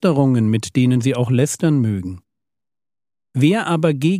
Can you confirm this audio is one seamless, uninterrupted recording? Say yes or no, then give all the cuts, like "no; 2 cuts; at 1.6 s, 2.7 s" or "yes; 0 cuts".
yes; 0 cuts